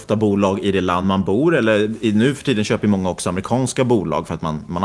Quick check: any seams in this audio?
no; 0 cuts

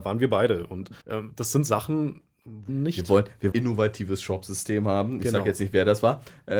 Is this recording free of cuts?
no; 3 cuts; at 1.0 s, 2.7 s, 3.5 s

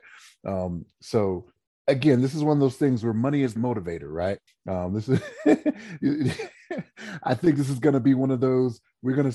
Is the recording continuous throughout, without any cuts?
no; 3 cuts; at 1.6 s, 3.6 s, 4.5 s

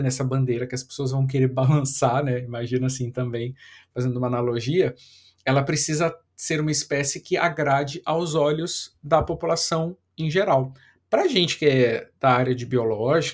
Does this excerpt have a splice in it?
no; 0 cuts

